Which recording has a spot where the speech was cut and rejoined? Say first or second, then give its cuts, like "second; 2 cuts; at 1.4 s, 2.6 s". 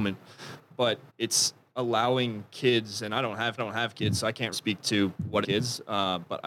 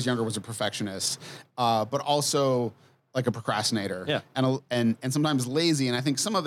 first; 4 cuts; at 1.1 s, 3.6 s, 4.5 s, 5.4 s